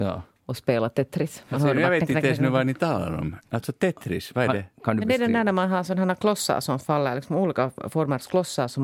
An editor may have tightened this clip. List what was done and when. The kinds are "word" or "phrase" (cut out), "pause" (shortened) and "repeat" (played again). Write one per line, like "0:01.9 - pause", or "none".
none